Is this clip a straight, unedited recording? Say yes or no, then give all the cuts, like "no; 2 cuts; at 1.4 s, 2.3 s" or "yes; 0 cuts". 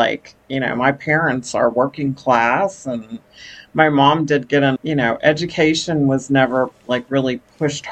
no; 1 cut; at 4.8 s